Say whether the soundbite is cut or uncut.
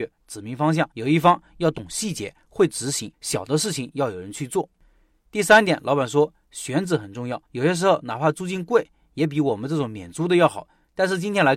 cut